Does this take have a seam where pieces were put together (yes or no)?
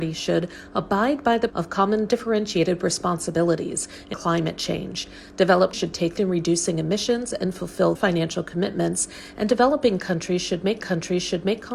yes